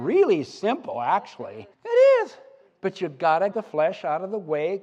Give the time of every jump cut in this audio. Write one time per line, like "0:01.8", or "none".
0:01.7
0:02.7
0:03.5